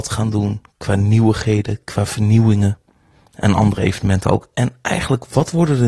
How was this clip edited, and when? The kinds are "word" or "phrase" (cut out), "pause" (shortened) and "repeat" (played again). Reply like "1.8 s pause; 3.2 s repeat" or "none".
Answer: none